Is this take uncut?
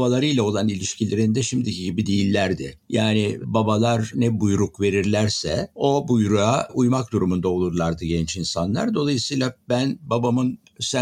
yes; 0 cuts

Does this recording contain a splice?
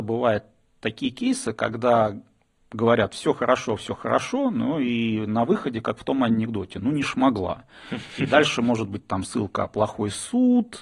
no; 0 cuts

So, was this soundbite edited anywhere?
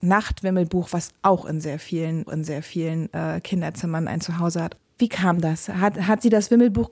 yes; 1 cut; at 2.3 s

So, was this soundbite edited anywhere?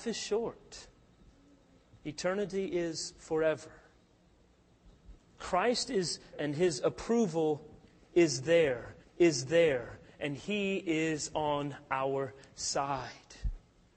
yes; 3 cuts; at 5.2 s, 6.3 s, 9.0 s

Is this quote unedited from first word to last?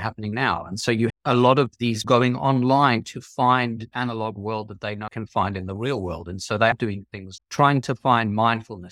no; 6 cuts; at 1.1 s, 2.0 s, 3.9 s, 5.1 s, 6.7 s, 7.4 s

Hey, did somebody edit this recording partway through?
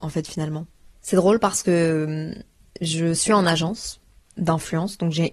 no; 0 cuts

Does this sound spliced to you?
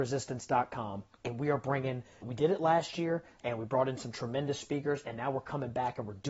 yes; 2 cuts; at 1.1 s, 2.2 s

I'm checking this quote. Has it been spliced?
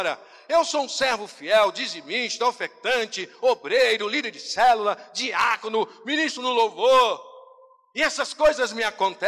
no; 0 cuts

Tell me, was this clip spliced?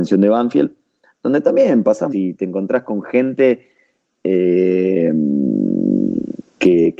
yes; 1 cut; at 2.1 s

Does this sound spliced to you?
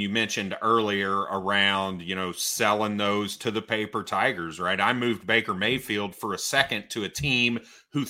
no; 0 cuts

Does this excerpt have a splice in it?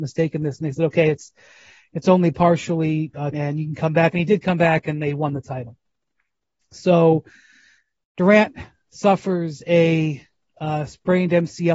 yes; 1 cut; at 3.3 s

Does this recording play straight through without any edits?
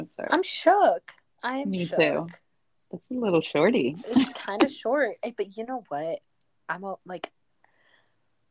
yes; 0 cuts

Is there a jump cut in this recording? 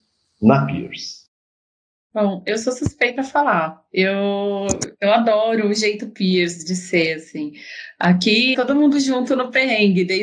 yes; 2 cuts; at 3.2 s, 8.5 s

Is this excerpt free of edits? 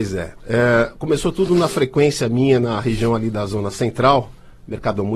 yes; 0 cuts

